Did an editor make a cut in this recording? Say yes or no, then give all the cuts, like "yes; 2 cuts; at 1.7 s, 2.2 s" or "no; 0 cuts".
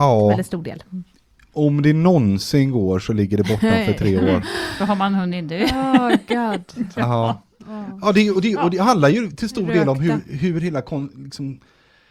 no; 0 cuts